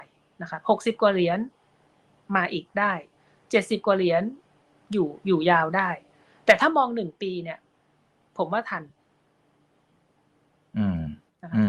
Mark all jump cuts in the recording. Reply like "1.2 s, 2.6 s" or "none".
none